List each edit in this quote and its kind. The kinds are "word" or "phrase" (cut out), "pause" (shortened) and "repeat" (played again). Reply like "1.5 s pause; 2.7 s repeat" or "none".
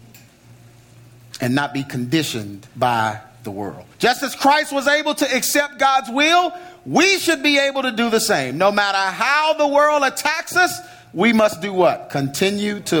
2.7 s pause; 3.9 s pause